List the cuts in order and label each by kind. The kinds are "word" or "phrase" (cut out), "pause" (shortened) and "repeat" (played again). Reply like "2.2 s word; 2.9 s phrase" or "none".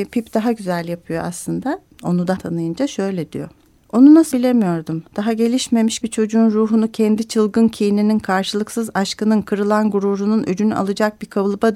2.4 s word; 3.8 s pause; 4.3 s word; 5.1 s pause; 6.0 s word